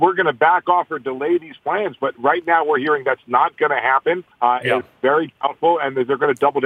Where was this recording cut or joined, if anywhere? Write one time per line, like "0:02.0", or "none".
0:04.3